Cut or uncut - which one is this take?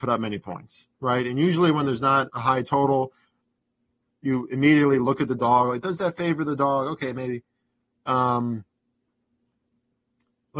uncut